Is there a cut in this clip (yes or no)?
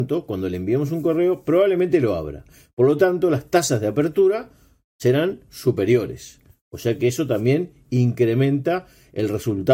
no